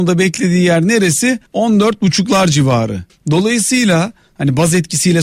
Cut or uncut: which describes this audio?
cut